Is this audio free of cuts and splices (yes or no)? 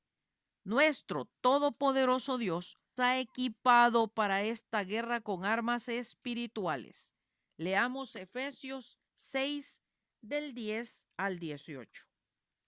no